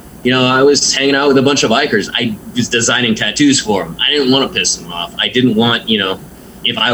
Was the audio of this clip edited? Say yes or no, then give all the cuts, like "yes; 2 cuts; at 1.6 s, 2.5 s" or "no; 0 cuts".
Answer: no; 0 cuts